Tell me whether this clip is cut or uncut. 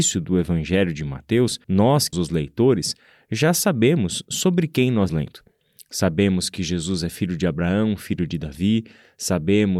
cut